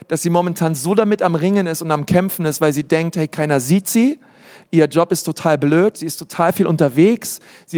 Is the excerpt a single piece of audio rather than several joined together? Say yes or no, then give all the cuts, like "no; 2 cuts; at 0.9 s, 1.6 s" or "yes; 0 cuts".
yes; 0 cuts